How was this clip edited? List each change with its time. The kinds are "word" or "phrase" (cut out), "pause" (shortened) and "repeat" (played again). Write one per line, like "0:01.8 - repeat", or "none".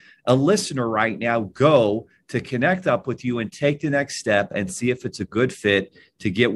none